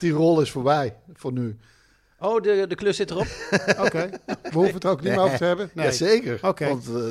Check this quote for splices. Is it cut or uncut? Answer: uncut